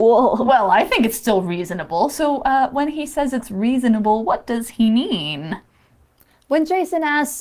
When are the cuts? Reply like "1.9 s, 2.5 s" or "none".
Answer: none